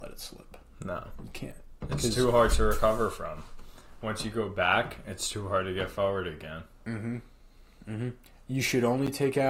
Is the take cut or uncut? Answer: uncut